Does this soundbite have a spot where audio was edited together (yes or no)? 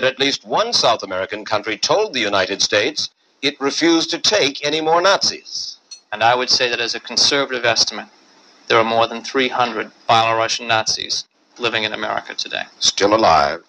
no